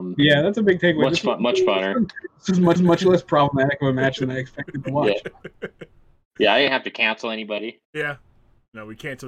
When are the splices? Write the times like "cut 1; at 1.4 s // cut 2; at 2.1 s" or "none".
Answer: cut 1; at 2.8 s // cut 2; at 7.8 s